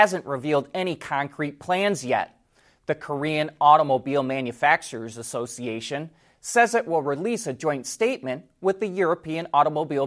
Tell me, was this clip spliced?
no; 0 cuts

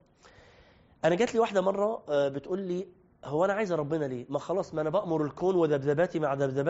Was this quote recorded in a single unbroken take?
yes; 0 cuts

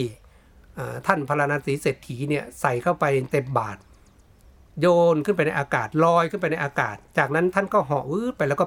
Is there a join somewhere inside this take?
no; 0 cuts

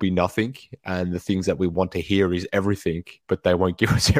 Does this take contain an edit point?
yes; 1 cut; at 3.2 s

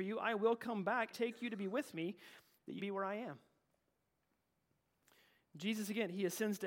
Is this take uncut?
no; 2 cuts; at 1.1 s, 2.8 s

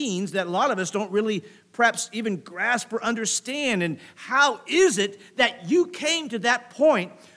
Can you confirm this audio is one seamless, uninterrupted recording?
yes; 0 cuts

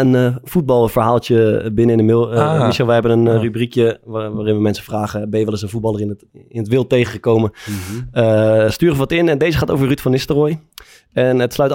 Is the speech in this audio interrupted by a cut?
no; 0 cuts

